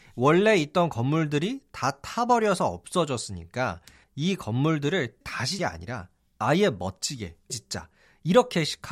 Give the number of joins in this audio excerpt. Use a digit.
3